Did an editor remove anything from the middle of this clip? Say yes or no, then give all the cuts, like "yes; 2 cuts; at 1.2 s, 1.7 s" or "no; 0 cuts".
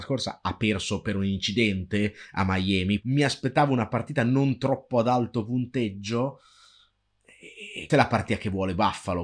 yes; 1 cut; at 7.9 s